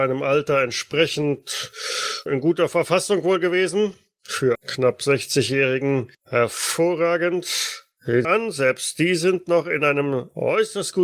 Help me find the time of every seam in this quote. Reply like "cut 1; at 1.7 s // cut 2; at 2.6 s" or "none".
cut 1; at 2.3 s // cut 2; at 4.5 s // cut 3; at 6.1 s // cut 4; at 8.2 s